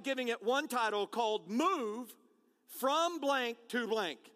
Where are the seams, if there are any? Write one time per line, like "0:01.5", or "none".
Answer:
none